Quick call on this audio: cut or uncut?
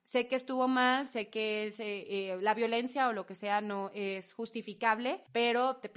uncut